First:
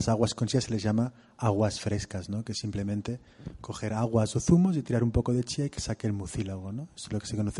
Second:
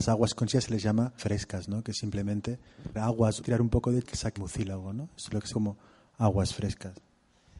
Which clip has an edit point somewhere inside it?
second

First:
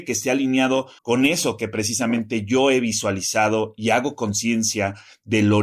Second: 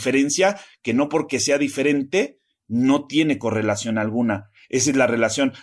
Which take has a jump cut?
first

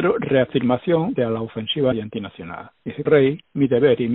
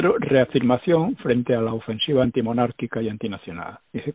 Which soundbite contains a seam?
first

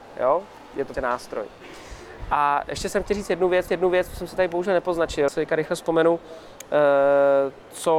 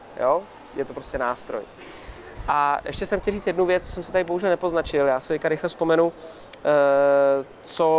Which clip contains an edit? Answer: first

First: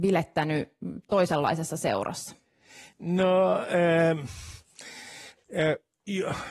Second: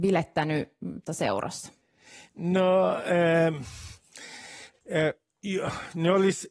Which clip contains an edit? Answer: second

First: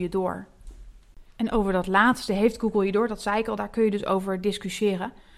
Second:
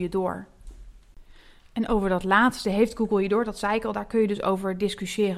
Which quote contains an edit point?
first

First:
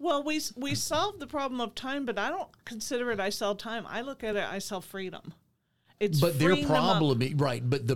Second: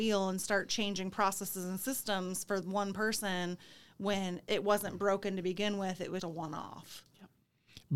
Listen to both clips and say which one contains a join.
second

